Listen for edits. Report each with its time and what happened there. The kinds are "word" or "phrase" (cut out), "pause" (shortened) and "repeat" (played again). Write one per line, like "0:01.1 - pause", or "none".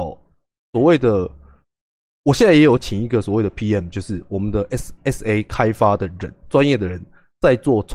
none